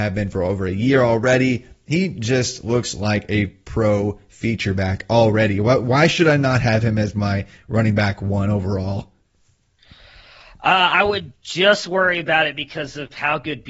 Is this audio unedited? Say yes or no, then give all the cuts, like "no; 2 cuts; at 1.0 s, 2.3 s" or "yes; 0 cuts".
yes; 0 cuts